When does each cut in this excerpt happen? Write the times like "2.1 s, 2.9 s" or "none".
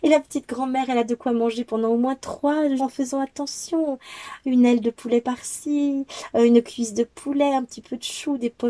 2.8 s